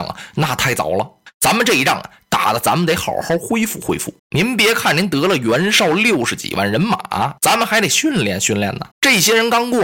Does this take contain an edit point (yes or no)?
yes